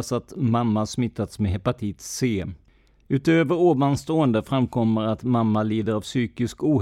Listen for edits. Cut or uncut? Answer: uncut